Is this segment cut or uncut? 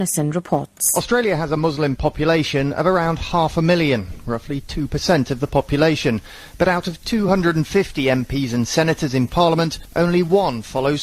uncut